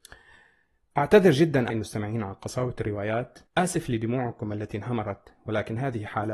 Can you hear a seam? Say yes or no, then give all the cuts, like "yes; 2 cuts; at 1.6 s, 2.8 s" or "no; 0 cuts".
yes; 2 cuts; at 1.7 s, 3.5 s